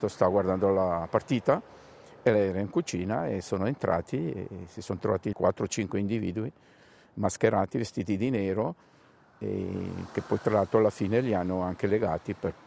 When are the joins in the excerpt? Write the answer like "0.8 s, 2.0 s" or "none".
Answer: 5.3 s

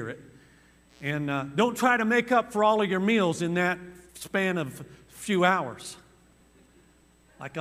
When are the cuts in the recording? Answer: 4.1 s

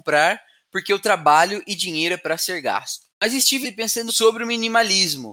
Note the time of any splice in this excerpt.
3.1 s, 3.6 s, 4.1 s

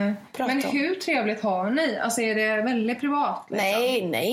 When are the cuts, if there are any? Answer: none

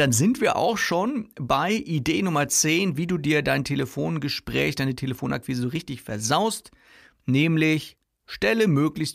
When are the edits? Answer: none

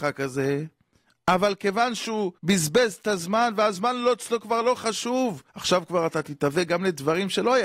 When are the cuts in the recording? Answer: 2.4 s, 5.5 s

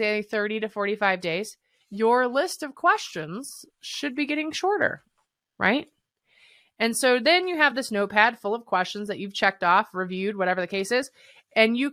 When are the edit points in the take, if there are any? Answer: none

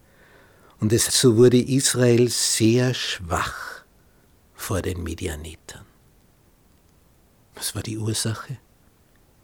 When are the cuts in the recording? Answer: 1.1 s

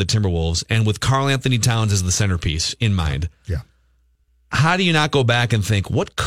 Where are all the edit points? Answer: none

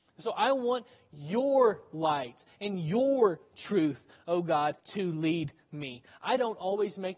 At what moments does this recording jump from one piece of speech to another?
4.8 s

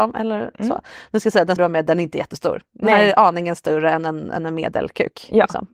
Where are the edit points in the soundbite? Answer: 1.6 s

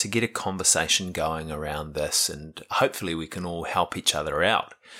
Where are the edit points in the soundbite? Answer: none

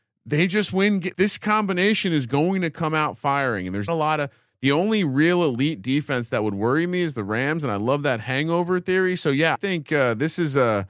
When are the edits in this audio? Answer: 1.1 s, 3.9 s, 9.5 s

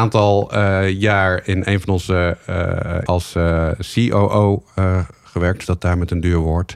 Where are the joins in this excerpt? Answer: 3.1 s, 5.6 s

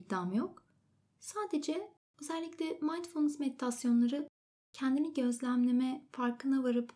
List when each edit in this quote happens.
none

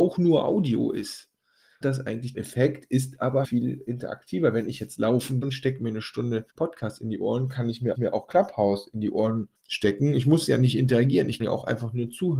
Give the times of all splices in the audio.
1.8 s, 2.3 s, 3.4 s, 5.4 s, 6.5 s, 7.9 s, 9.6 s, 11.4 s

